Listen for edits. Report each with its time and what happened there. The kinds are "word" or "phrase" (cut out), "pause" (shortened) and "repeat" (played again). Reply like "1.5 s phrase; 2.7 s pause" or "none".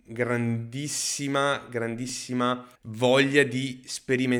2.7 s pause